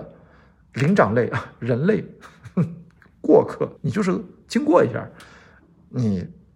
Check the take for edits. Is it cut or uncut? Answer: cut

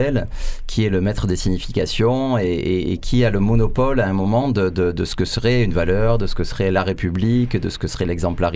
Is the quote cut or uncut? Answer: uncut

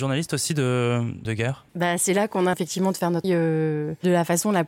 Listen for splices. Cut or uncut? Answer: cut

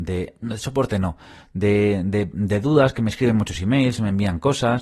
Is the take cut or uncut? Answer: uncut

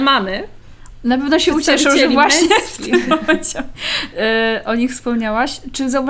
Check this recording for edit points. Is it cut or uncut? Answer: uncut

